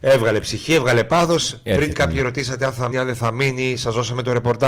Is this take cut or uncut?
cut